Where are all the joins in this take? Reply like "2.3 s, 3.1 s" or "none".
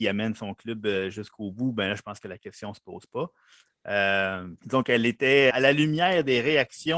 4.6 s, 5.5 s